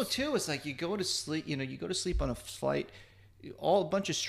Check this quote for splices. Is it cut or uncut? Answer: uncut